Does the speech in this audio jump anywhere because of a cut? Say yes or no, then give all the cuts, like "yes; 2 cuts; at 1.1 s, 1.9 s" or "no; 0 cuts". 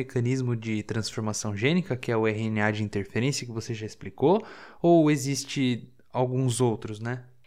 no; 0 cuts